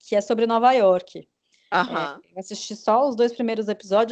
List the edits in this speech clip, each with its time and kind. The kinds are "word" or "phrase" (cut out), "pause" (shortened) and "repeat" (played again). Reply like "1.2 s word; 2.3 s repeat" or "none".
none